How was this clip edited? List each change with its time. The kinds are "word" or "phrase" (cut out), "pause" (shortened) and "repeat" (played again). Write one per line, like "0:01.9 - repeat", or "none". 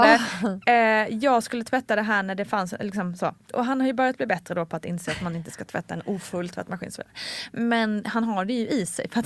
0:03.4 - pause